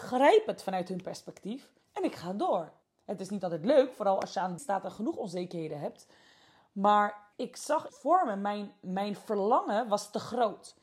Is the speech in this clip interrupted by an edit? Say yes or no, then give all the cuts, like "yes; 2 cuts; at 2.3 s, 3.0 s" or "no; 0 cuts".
yes; 5 cuts; at 1.8 s, 2.8 s, 4.6 s, 7.3 s, 7.9 s